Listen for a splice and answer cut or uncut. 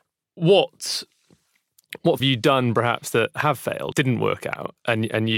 cut